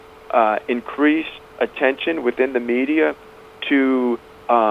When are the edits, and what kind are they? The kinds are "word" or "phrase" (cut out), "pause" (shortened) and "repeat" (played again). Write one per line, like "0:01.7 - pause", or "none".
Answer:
none